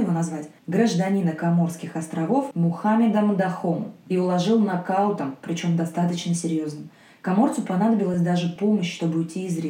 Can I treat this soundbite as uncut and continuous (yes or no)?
yes